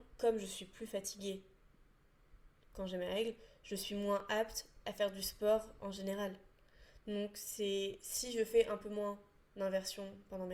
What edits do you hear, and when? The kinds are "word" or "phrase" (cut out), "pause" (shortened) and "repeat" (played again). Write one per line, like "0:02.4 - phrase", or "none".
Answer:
none